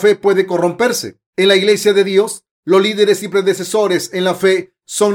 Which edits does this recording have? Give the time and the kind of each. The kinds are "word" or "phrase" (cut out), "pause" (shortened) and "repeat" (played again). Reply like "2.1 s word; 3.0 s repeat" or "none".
1.3 s pause